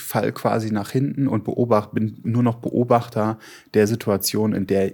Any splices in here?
no; 0 cuts

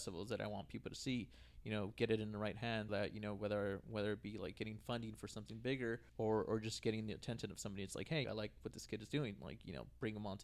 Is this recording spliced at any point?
yes; 3 cuts; at 2.9 s, 6.1 s, 8.2 s

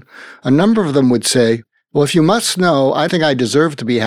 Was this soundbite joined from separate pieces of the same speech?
yes; 1 cut; at 3.1 s

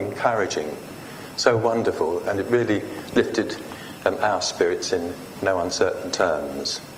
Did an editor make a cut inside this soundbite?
no; 0 cuts

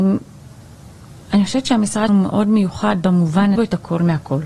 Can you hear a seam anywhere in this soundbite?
yes; 2 cuts; at 2.1 s, 3.6 s

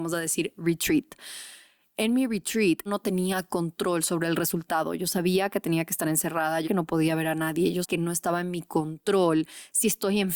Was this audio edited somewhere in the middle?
yes; 3 cuts; at 2.9 s, 6.6 s, 7.8 s

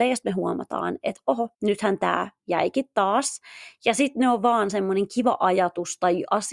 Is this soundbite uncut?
no; 1 cut; at 1.5 s

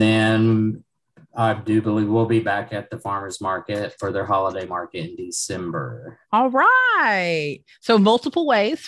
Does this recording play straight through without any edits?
no; 1 cut; at 6.2 s

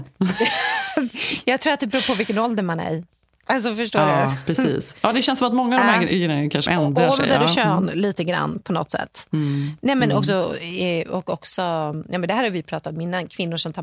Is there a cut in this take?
yes; 1 cut; at 6.7 s

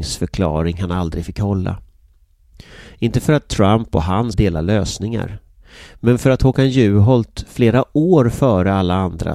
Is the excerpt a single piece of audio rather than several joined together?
no; 1 cut; at 4.3 s

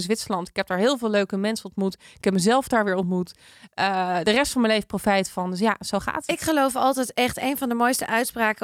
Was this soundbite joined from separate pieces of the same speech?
no; 0 cuts

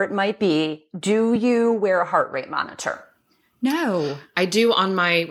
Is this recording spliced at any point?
no; 0 cuts

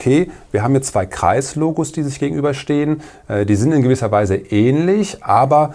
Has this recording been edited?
no; 0 cuts

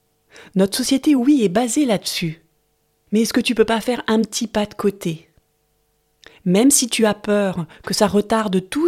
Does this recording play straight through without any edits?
yes; 0 cuts

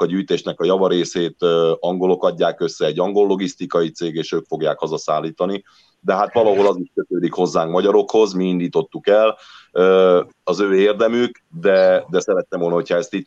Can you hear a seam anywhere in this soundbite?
yes; 1 cut; at 11.5 s

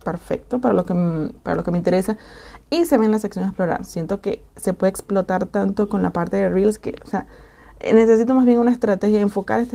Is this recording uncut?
yes; 0 cuts

